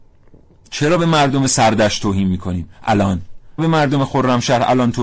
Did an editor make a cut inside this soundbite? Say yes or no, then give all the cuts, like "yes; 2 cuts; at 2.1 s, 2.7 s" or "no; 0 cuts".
yes; 1 cut; at 3.6 s